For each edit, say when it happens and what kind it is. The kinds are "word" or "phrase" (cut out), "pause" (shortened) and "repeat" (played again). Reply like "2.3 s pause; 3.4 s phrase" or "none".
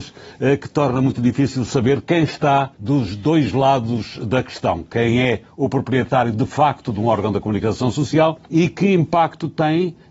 2.7 s pause; 8.4 s pause